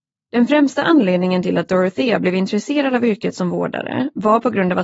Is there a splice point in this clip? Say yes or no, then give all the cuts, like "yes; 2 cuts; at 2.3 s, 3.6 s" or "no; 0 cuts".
no; 0 cuts